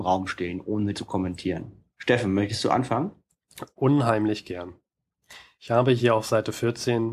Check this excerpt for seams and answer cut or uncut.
cut